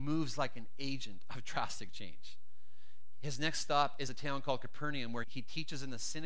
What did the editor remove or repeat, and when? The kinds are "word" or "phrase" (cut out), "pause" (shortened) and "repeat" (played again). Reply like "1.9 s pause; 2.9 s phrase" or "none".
5.2 s word